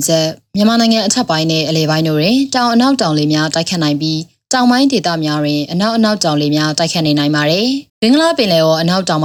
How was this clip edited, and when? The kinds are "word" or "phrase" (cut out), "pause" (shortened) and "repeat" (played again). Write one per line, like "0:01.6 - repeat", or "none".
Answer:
0:07.9 - pause